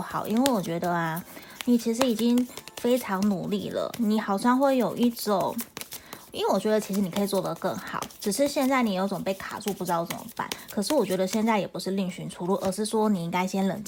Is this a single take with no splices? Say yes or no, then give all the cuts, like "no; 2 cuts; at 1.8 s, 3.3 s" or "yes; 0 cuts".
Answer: yes; 0 cuts